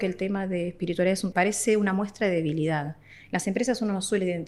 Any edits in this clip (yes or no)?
yes